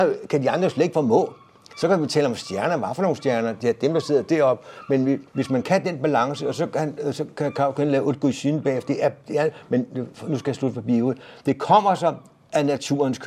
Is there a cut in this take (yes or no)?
yes